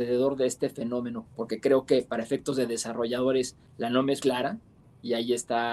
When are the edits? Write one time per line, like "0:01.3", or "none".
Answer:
0:01.2
0:03.7
0:04.2